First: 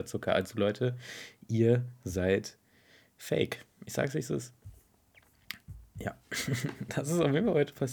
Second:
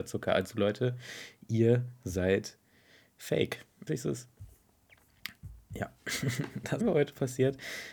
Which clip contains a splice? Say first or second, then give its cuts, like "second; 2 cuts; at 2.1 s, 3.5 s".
second; 2 cuts; at 3.9 s, 6.8 s